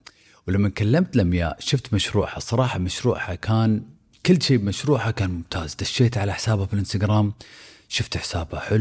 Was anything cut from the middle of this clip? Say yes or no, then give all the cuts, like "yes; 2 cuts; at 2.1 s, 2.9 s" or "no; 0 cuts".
no; 0 cuts